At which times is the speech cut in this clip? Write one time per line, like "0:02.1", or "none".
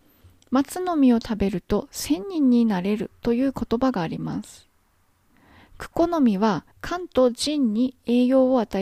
0:06.7